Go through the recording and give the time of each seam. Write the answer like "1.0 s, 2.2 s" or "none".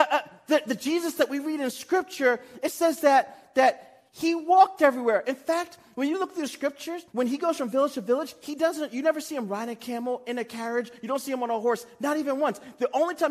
4.1 s, 7.1 s